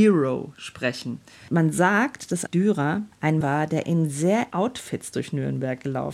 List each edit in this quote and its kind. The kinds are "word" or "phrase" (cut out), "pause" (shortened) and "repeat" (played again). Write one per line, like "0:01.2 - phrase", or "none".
0:02.5 - word
0:03.4 - word
0:03.8 - word
0:04.5 - word